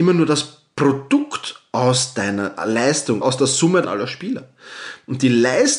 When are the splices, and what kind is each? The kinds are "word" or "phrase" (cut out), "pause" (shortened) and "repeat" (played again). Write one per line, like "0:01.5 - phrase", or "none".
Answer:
0:03.2 - word
0:03.8 - word

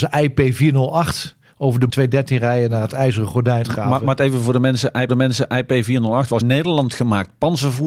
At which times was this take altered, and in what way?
0:01.9 - word
0:03.6 - phrase
0:05.1 - repeat
0:06.4 - phrase

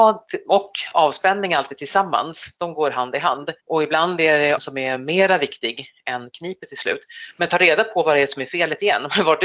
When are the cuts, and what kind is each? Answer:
0:03.6 - pause
0:04.6 - word

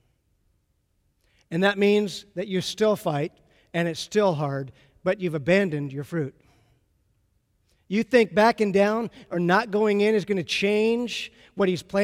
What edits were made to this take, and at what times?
none

